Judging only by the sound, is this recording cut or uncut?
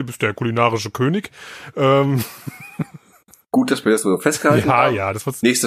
uncut